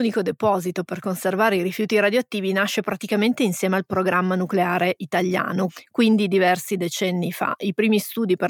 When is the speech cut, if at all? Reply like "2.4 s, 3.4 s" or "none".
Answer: none